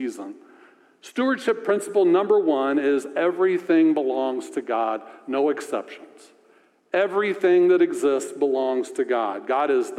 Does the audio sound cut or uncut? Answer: uncut